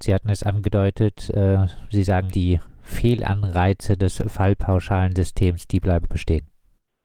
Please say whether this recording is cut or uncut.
cut